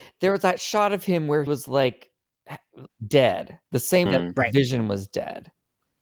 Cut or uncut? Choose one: cut